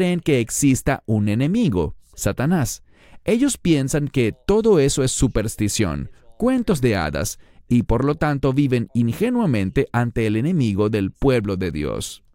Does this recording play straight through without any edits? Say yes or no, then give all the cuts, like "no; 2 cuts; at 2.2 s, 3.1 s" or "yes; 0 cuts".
yes; 0 cuts